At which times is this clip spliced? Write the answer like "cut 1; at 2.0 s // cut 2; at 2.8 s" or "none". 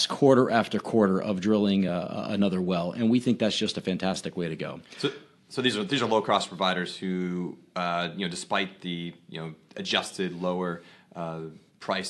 none